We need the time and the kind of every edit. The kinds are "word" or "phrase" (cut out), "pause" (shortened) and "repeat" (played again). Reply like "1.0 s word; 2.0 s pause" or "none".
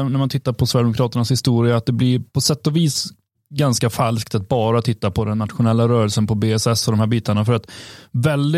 none

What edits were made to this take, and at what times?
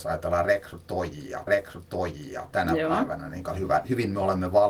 1.5 s repeat; 3.5 s word

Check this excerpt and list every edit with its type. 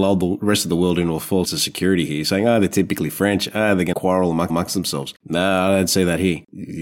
1.4 s word; 3.9 s word; 4.5 s repeat

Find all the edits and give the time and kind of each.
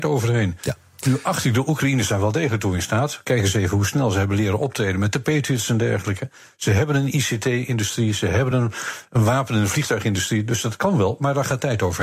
none

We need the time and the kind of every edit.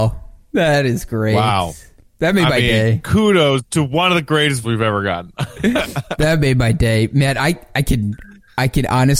4.6 s word

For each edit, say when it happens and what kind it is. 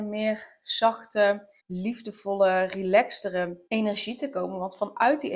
1.6 s pause; 3.7 s pause

